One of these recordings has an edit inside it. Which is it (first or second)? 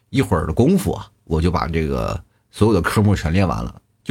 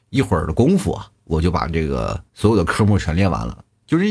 second